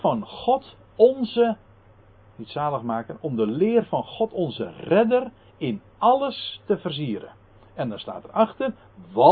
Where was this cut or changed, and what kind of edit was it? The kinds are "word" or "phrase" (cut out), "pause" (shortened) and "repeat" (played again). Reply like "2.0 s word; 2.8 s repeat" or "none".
none